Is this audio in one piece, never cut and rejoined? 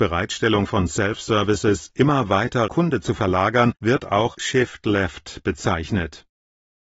no; 3 cuts; at 2.7 s, 3.8 s, 4.3 s

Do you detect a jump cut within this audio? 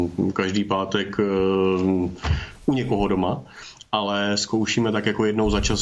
no; 0 cuts

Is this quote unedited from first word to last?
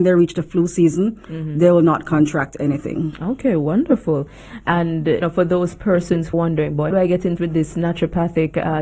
no; 4 cuts; at 5.2 s, 6.3 s, 6.9 s, 7.4 s

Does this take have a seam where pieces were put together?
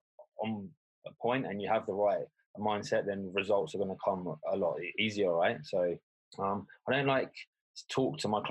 yes; 1 cut; at 6.2 s

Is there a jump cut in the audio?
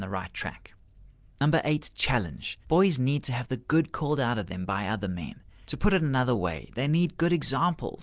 yes; 1 cut; at 2.6 s

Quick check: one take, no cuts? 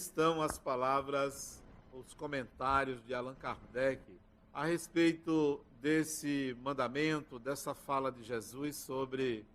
no; 2 cuts; at 4.3 s, 5.7 s

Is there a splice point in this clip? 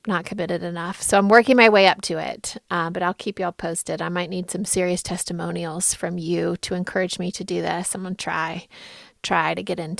no; 0 cuts

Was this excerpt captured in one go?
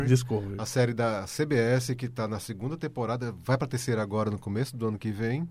yes; 0 cuts

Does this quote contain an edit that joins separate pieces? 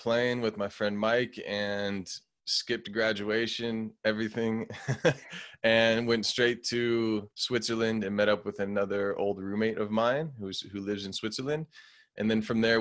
yes; 1 cut; at 7.3 s

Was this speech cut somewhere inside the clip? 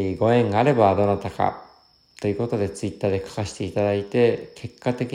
no; 0 cuts

